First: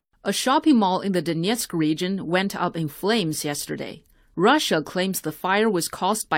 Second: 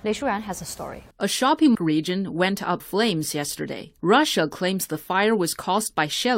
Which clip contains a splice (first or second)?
second